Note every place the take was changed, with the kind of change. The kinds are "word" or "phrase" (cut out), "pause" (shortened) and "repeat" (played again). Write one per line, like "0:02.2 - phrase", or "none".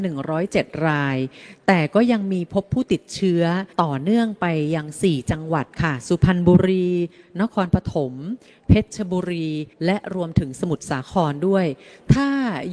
0:03.7 - pause
0:09.7 - pause